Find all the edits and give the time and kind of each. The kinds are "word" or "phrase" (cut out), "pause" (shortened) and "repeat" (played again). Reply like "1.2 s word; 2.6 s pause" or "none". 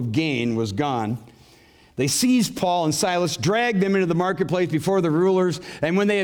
none